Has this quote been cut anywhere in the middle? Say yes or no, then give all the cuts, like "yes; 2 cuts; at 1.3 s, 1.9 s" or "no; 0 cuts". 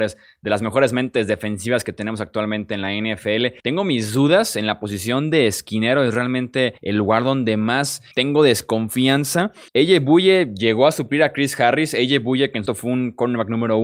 yes; 5 cuts; at 3.6 s, 6.8 s, 8.1 s, 9.7 s, 12.7 s